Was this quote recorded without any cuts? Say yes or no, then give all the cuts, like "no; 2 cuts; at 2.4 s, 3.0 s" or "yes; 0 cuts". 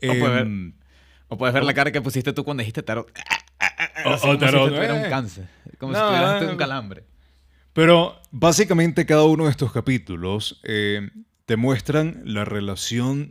yes; 0 cuts